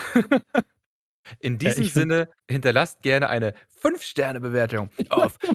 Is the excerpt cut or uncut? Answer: cut